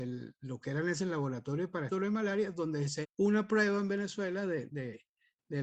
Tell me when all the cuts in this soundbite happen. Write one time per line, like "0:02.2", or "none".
0:01.0
0:01.9
0:03.0
0:04.7